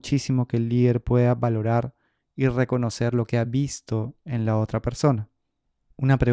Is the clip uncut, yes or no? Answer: yes